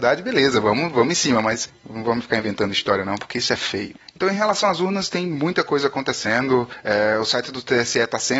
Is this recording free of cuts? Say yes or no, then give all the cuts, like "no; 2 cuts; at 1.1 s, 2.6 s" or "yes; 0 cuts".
yes; 0 cuts